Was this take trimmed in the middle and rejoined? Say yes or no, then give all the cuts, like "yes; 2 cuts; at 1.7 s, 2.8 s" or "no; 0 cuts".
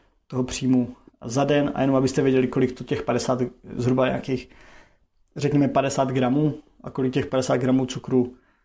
no; 0 cuts